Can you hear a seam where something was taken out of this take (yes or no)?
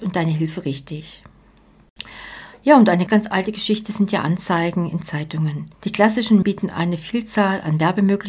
yes